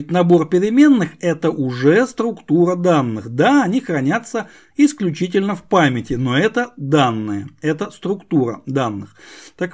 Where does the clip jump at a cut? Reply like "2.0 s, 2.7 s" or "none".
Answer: none